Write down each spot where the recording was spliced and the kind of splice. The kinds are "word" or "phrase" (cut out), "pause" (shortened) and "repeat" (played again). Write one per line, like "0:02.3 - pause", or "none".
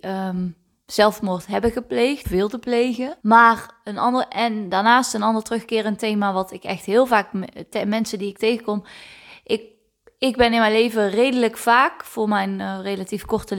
0:02.2 - word
0:03.2 - pause